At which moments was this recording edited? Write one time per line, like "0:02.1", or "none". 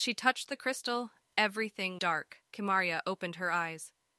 0:02.0
0:02.5